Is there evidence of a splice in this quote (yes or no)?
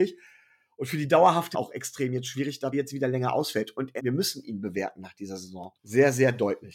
yes